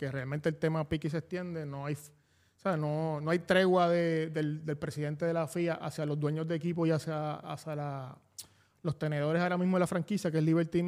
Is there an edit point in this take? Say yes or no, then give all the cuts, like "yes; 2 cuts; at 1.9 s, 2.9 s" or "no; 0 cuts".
no; 0 cuts